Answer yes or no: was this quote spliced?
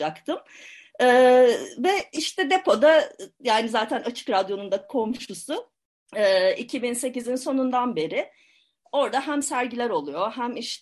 no